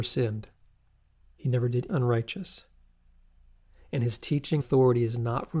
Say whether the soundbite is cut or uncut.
cut